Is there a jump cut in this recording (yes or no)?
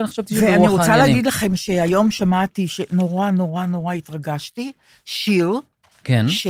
no